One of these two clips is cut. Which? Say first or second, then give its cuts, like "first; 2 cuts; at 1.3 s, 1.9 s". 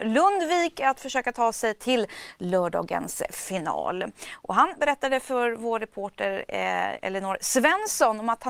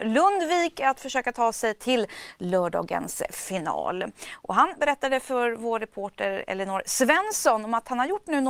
second; 1 cut; at 6.5 s